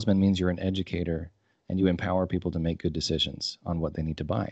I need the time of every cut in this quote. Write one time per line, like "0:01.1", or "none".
none